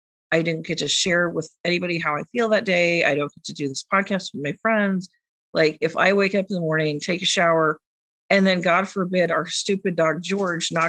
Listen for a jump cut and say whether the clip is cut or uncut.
uncut